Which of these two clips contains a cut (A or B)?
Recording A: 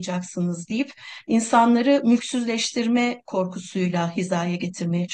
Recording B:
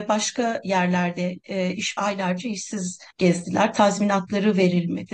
B